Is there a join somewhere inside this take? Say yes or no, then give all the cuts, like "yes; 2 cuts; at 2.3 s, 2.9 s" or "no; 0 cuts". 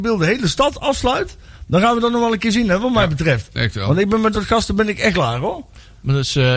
yes; 2 cuts; at 4.3 s, 5.1 s